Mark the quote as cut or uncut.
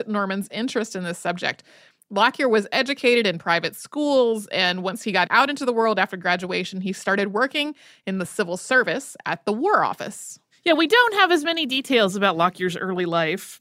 uncut